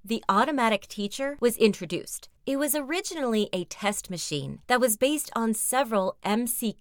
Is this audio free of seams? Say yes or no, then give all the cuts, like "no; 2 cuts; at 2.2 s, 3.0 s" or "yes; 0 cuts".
no; 2 cuts; at 2.4 s, 4.6 s